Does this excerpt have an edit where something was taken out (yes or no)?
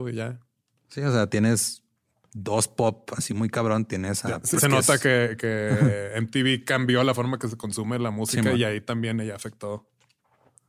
yes